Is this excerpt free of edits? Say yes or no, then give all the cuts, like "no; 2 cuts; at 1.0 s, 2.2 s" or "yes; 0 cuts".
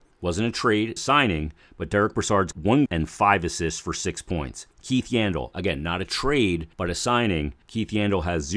no; 6 cuts; at 1.0 s, 2.5 s, 2.9 s, 4.7 s, 6.7 s, 7.6 s